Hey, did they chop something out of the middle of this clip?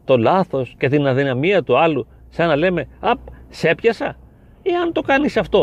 no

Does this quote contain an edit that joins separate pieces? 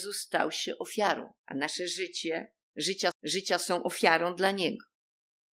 yes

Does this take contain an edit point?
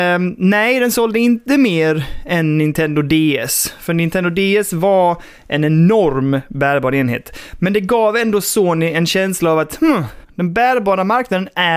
yes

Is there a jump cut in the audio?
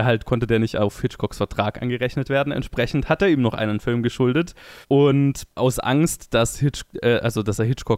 yes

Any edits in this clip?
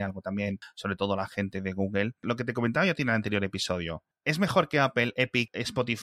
no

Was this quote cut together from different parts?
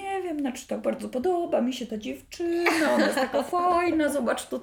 no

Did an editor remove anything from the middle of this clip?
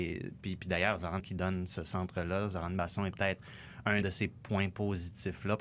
yes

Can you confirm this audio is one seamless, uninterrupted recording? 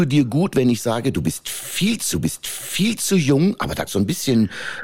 no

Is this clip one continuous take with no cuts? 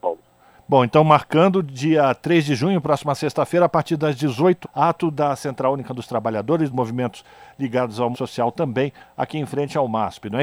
no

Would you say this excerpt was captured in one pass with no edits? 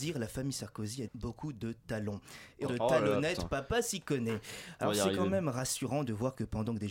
no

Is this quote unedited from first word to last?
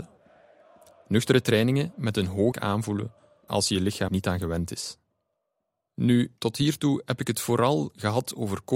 no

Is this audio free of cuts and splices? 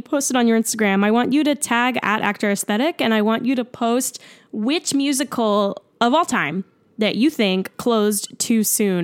yes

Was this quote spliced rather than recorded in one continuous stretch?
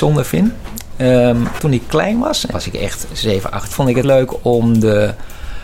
yes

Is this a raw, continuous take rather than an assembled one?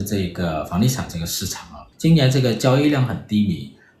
no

